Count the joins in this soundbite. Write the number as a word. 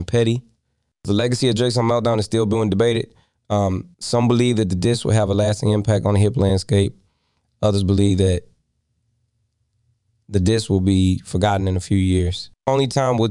one